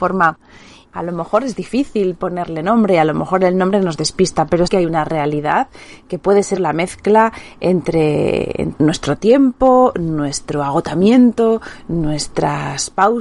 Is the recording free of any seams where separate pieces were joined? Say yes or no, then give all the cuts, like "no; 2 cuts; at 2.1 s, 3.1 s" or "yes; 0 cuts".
no; 2 cuts; at 4.7 s, 6.6 s